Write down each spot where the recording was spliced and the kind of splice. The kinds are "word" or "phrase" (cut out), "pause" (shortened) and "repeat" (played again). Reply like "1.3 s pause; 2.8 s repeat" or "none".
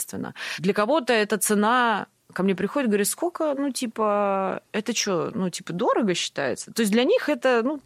none

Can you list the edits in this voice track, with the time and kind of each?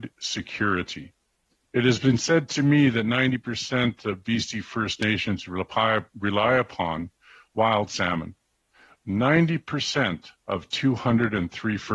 none

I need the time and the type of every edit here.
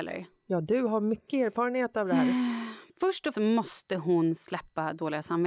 2.9 s pause; 3.3 s word

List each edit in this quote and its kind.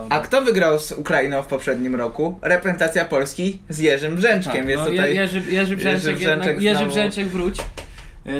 none

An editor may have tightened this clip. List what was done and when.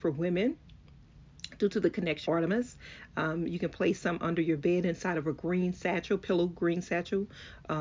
2.3 s word

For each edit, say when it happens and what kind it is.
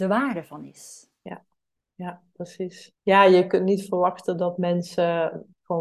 3.0 s pause

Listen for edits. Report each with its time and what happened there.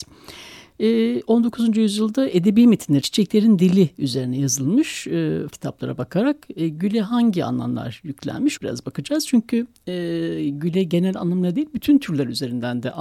3.0 s word; 5.5 s word; 8.6 s word

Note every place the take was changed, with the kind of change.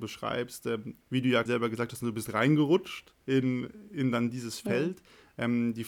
1.0 s pause; 1.5 s word; 3.2 s pause

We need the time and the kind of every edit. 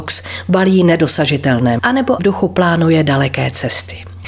1.8 s word; 2.2 s word

